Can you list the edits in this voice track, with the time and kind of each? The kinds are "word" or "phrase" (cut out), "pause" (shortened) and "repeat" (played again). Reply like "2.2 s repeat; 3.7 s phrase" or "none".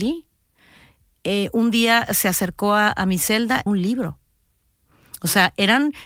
3.7 s phrase